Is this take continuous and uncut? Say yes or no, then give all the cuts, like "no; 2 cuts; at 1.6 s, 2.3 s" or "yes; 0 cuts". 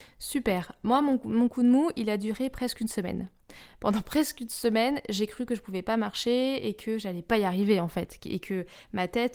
yes; 0 cuts